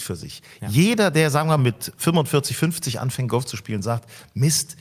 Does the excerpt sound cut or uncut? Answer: cut